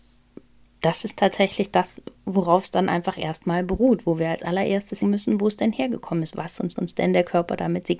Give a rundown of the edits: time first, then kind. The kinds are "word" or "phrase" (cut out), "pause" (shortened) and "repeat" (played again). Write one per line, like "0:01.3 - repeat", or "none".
0:05.0 - word
0:06.8 - repeat